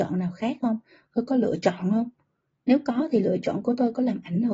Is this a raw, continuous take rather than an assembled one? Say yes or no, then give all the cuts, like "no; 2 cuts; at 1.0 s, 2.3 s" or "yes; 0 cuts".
yes; 0 cuts